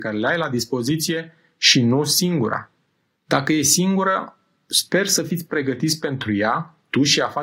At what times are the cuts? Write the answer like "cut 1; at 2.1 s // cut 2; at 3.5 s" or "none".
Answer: none